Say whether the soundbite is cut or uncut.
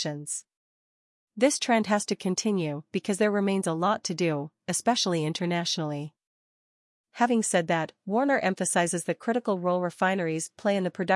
uncut